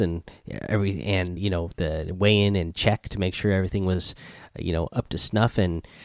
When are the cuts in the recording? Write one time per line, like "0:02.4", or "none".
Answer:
0:01.4
0:01.7